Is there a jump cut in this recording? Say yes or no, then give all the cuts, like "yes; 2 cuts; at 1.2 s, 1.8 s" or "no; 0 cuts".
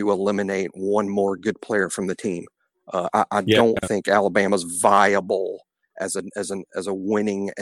no; 0 cuts